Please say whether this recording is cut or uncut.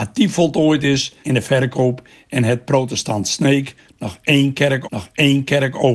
cut